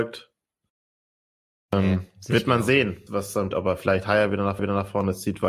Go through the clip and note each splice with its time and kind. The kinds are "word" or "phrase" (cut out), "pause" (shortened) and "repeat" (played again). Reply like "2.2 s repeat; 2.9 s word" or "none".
3.1 s word; 3.5 s word; 4.6 s repeat

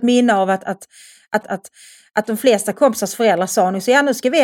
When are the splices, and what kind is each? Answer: 1.4 s repeat

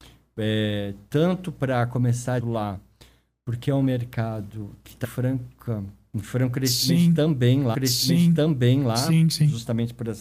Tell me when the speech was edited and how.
2.4 s phrase; 5.0 s word; 7.7 s repeat

